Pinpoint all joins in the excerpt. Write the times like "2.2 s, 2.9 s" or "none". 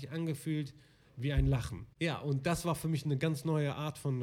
1.9 s